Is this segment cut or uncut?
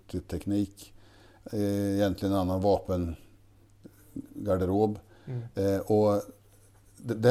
uncut